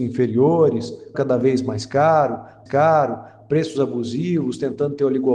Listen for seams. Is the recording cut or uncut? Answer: cut